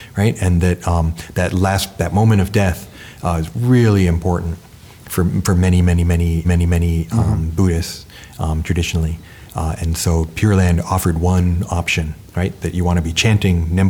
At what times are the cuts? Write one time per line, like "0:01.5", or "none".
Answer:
0:06.4
0:12.3